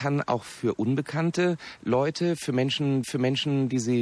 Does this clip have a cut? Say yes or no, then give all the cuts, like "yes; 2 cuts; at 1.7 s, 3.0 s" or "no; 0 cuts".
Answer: yes; 1 cut; at 3.0 s